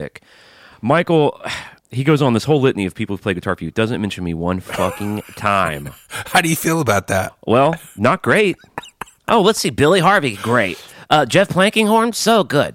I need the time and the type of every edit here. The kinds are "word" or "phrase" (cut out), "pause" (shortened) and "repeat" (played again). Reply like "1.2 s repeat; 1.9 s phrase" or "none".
1.8 s pause